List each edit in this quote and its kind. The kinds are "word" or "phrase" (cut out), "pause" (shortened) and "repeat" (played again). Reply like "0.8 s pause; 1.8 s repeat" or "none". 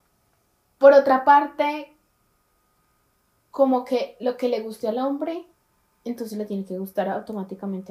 none